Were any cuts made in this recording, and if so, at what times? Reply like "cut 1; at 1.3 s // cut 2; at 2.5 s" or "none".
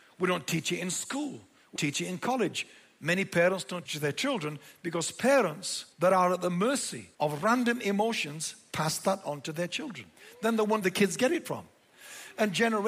cut 1; at 1.8 s // cut 2; at 3.9 s // cut 3; at 5.9 s // cut 4; at 7.1 s // cut 5; at 10.8 s